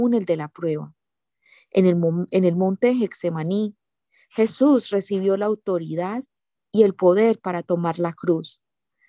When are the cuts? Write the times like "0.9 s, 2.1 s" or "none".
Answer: none

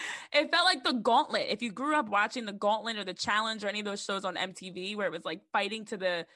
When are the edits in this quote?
none

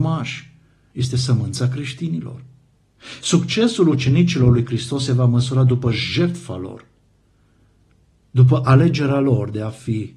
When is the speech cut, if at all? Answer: none

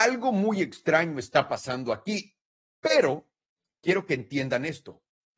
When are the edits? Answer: none

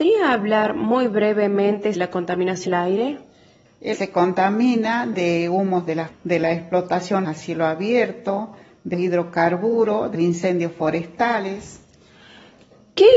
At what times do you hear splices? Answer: 1.9 s, 2.7 s, 3.9 s, 6.1 s, 7.2 s, 8.9 s, 10.1 s

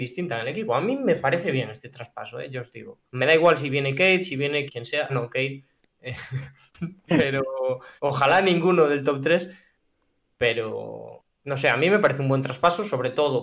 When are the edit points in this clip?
3.1 s, 4.7 s, 5.1 s, 8.0 s, 11.3 s

